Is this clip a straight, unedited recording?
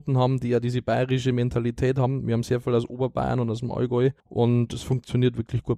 no; 1 cut; at 4.2 s

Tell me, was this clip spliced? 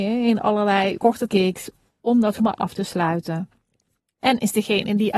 yes; 3 cuts; at 1.0 s, 1.3 s, 2.4 s

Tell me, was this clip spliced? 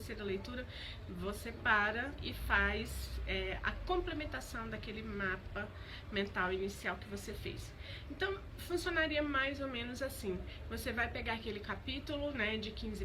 yes; 1 cut; at 2.2 s

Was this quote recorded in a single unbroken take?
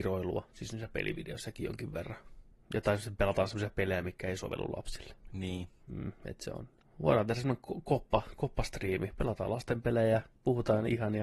yes; 0 cuts

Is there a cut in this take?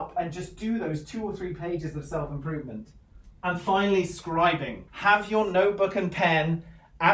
yes; 2 cuts; at 3.4 s, 4.9 s

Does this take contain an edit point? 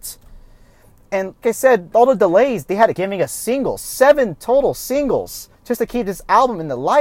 yes; 4 cuts; at 1.4 s, 1.9 s, 3.0 s, 5.5 s

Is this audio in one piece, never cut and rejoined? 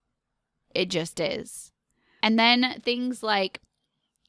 no; 1 cut; at 2.2 s

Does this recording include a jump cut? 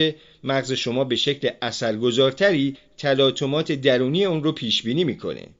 no; 0 cuts

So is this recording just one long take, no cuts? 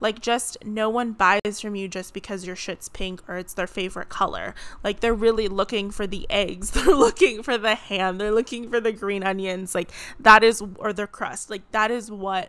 yes; 0 cuts

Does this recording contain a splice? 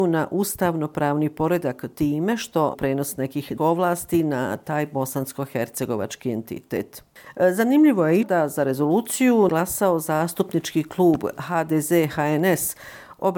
yes; 4 cuts; at 2.7 s, 3.6 s, 8.2 s, 9.5 s

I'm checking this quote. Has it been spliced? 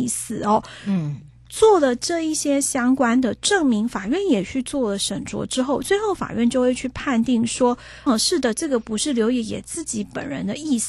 yes; 1 cut; at 8.1 s

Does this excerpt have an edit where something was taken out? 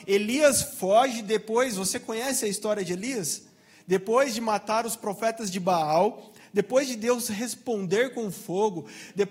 no; 0 cuts

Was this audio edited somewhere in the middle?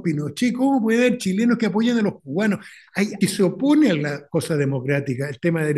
yes; 1 cut; at 3.2 s

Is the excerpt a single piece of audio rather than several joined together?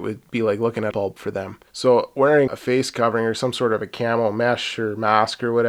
no; 3 cuts; at 0.9 s, 1.7 s, 2.5 s

